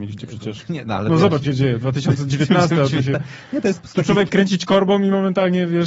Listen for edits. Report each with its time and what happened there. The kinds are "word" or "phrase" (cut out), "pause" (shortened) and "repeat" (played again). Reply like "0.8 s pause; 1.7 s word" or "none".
1.4 s word; 4.3 s word

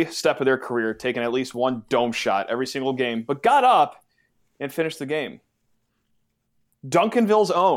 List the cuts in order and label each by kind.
none

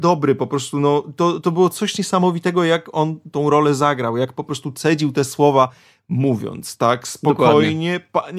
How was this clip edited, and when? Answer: none

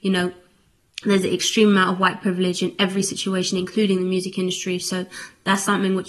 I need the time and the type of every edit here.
none

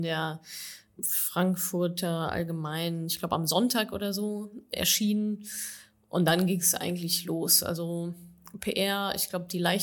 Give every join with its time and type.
none

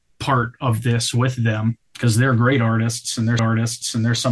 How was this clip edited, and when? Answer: 1.8 s pause; 3.4 s repeat

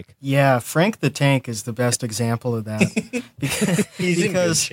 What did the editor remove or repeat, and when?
none

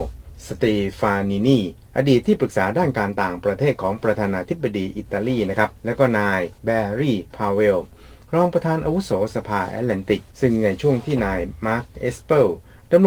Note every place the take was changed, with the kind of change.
5.8 s pause; 6.6 s pause; 10.3 s pause

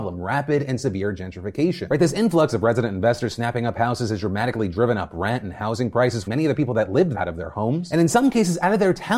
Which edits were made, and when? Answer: 6.3 s word; 7.1 s word

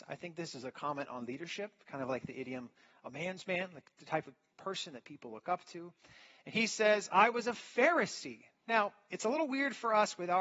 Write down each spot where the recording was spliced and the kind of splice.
none

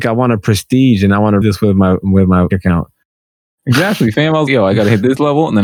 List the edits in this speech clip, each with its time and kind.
1.4 s word; 2.5 s word; 4.5 s word

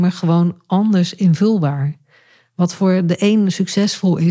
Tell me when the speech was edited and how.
none

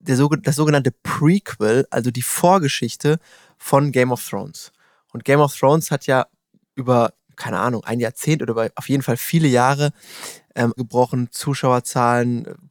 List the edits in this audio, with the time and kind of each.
10.8 s phrase

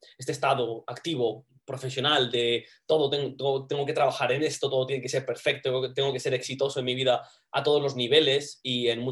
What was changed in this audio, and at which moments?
none

